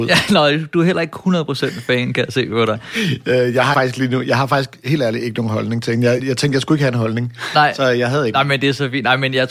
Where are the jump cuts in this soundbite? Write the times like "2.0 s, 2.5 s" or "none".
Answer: 3.7 s, 6.2 s

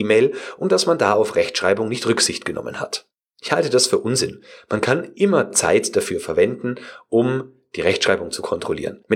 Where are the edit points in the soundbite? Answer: none

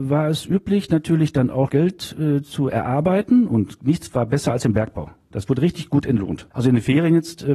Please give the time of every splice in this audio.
1.7 s, 6.5 s

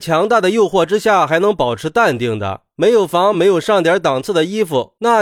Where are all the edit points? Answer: 3.3 s

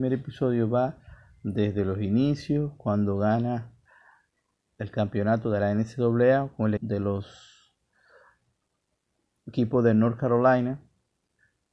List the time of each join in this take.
6.8 s

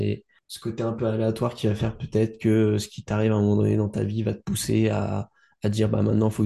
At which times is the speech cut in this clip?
none

